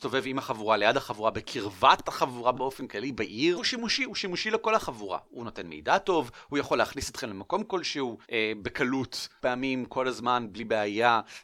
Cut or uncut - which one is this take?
cut